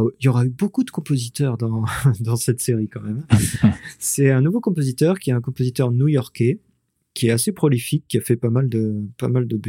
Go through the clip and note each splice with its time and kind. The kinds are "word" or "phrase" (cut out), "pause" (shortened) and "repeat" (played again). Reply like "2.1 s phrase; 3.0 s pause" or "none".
none